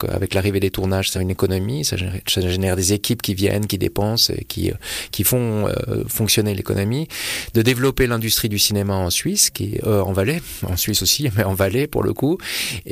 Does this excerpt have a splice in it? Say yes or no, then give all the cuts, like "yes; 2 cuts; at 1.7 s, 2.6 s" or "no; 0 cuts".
yes; 1 cut; at 1.1 s